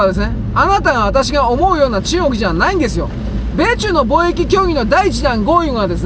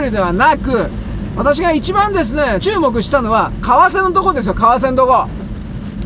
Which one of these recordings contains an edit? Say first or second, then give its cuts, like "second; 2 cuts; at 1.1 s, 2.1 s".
second; 1 cut; at 2.6 s